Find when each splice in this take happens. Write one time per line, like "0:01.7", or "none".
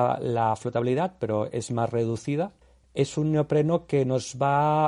0:02.6